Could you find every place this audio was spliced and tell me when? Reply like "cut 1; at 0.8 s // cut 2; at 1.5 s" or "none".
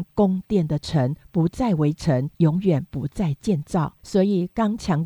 cut 1; at 2.3 s // cut 2; at 4.0 s